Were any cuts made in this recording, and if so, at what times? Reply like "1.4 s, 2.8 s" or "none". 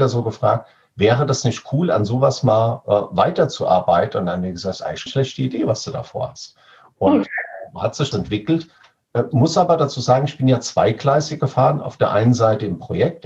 5.1 s, 8.1 s